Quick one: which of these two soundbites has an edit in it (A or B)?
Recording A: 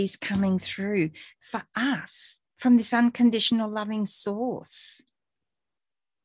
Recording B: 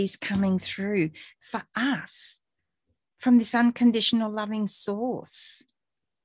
A